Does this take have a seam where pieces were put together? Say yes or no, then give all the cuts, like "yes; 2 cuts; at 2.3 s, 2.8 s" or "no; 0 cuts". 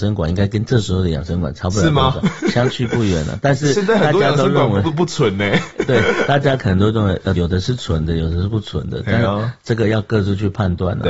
yes; 1 cut; at 7.4 s